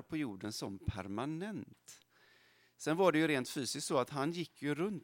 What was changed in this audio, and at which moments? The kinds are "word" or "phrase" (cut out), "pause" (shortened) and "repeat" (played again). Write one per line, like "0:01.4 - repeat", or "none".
none